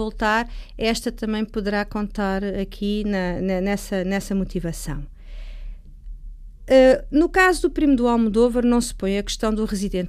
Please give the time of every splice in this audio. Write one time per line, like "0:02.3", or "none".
none